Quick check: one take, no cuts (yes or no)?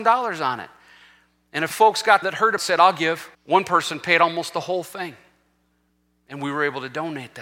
no